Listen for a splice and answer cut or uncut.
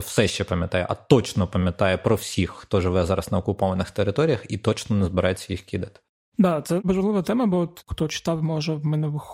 uncut